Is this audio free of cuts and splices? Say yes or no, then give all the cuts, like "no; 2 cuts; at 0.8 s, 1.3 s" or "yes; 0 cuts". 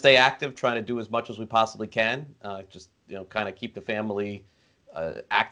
yes; 0 cuts